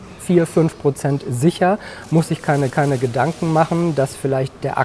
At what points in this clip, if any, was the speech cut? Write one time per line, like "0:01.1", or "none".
0:02.7